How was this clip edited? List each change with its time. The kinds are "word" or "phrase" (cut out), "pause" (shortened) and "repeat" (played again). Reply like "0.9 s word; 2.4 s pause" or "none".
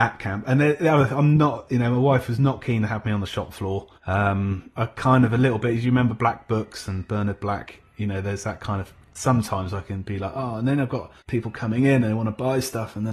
3.9 s pause; 11.2 s pause